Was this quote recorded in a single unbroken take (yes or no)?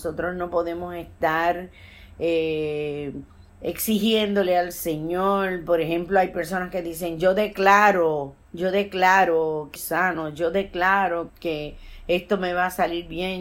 no